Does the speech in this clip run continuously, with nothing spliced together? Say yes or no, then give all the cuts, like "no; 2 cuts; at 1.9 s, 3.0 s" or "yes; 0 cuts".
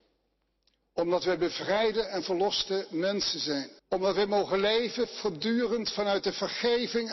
no; 1 cut; at 3.8 s